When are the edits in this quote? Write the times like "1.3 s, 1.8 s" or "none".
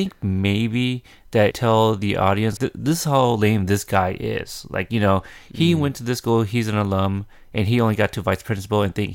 1.5 s, 2.6 s